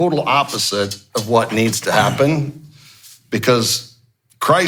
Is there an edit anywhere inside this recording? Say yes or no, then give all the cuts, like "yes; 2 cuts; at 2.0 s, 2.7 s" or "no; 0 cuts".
no; 0 cuts